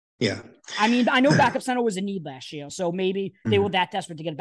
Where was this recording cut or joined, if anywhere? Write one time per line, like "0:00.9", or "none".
none